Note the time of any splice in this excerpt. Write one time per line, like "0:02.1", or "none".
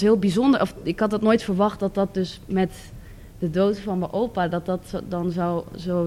none